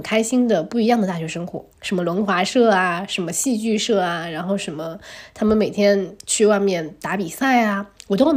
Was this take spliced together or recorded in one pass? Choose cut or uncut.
cut